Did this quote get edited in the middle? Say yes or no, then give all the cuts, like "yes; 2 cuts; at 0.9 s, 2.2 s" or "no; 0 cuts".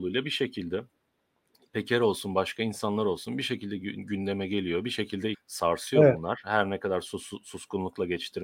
yes; 1 cut; at 5.3 s